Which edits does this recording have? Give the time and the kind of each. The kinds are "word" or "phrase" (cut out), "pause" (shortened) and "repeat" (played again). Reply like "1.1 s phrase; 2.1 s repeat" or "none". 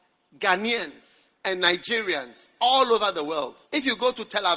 1.4 s pause; 3.6 s pause